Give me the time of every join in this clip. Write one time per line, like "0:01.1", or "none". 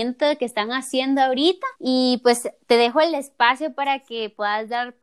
0:01.8